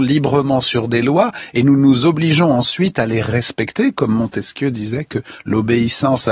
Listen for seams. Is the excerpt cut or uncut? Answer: uncut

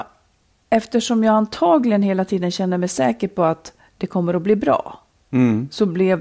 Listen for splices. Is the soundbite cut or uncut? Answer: uncut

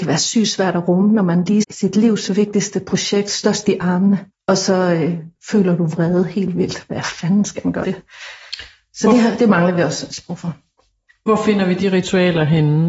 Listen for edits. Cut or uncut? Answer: cut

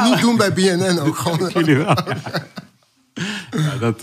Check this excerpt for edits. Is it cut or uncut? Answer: cut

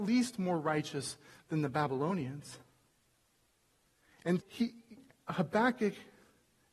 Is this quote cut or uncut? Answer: cut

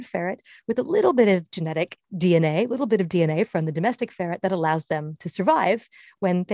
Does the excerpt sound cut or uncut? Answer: cut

